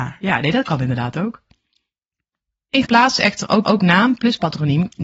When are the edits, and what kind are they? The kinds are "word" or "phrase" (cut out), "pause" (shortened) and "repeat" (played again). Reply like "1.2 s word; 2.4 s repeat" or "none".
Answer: 2.8 s word; 3.2 s word; 3.6 s repeat